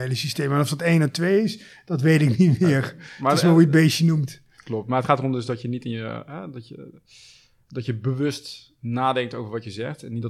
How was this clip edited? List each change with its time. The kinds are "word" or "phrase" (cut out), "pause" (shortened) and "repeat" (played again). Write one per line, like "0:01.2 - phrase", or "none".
none